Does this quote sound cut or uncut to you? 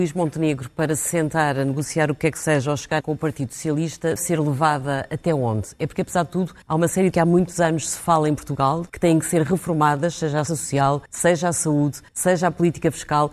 cut